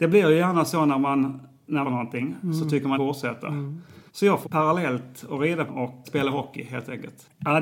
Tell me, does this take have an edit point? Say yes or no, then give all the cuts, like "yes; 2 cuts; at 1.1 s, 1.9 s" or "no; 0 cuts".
yes; 6 cuts; at 1.8 s, 2.9 s, 4.1 s, 4.4 s, 5.7 s, 6.0 s